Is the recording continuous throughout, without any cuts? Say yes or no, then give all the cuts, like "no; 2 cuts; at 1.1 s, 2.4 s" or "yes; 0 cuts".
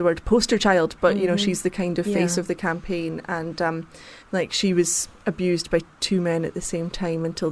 no; 1 cut; at 4.2 s